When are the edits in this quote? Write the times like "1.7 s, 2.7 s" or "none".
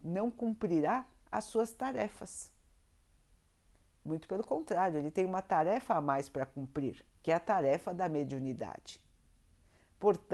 7.1 s